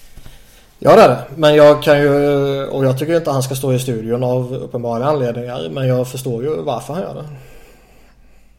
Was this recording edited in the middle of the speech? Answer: no; 0 cuts

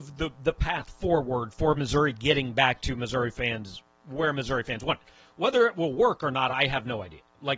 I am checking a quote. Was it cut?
no; 0 cuts

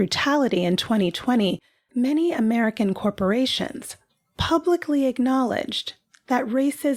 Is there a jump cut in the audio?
no; 0 cuts

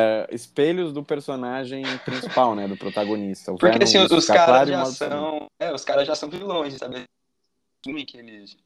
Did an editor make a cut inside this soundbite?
no; 0 cuts

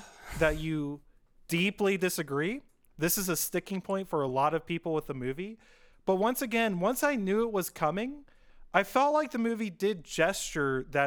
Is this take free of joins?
yes; 0 cuts

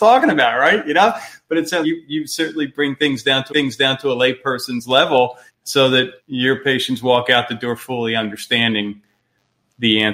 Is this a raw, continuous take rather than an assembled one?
no; 4 cuts; at 1.8 s, 3.5 s, 5.5 s, 6.2 s

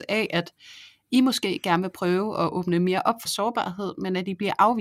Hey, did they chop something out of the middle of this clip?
yes; 1 cut; at 3.3 s

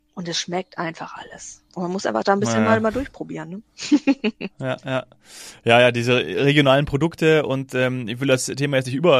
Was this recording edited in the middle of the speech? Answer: yes; 1 cut; at 1.7 s

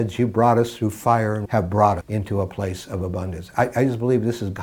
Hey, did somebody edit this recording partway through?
yes; 2 cuts; at 1.4 s, 2.0 s

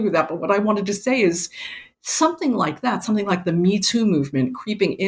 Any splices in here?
no; 0 cuts

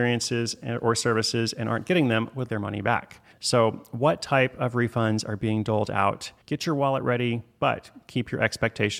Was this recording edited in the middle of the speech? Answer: yes; 3 cuts; at 2.5 s, 3.3 s, 6.4 s

